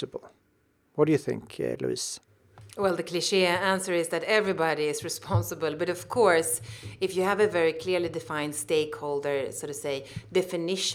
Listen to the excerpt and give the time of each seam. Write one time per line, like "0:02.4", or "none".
none